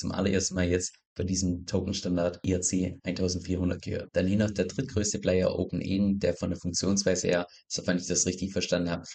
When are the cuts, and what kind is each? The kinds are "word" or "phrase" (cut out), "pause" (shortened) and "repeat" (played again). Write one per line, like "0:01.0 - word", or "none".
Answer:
none